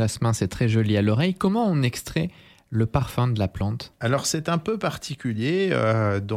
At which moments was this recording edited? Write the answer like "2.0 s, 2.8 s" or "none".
none